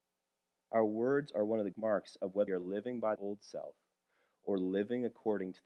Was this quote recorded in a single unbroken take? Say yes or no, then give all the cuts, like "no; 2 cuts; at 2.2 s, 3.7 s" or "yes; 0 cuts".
no; 3 cuts; at 1.7 s, 2.5 s, 3.2 s